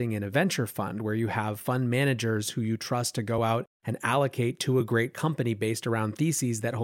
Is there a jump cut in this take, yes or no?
no